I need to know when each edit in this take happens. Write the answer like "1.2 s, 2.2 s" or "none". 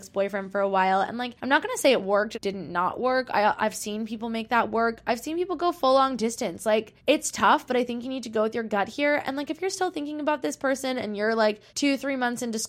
1.4 s, 2.3 s, 7.0 s, 11.7 s